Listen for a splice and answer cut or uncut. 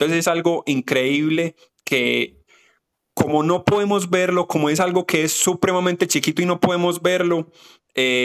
uncut